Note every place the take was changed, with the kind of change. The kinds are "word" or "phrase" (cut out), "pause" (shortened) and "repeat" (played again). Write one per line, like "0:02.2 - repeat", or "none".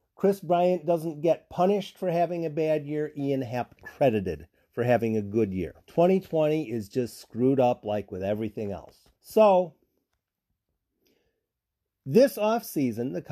0:03.8 - phrase
0:05.8 - pause
0:09.2 - pause

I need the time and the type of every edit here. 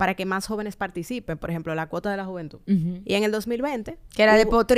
none

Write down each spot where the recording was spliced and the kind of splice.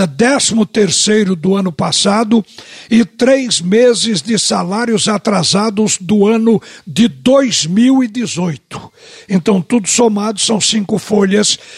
none

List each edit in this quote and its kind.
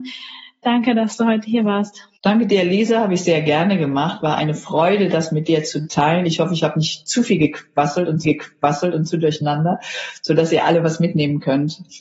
0:02.2 - pause
0:08.2 - repeat

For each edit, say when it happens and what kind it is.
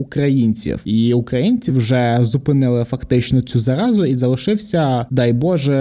0:01.7 - word

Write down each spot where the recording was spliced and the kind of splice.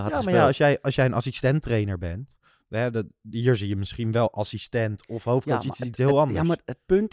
none

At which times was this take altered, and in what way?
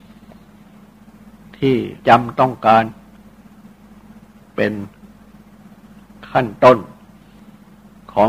0:02.0 - pause

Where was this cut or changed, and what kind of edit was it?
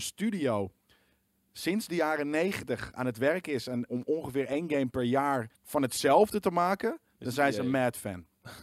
0:03.9 - word
0:05.6 - pause

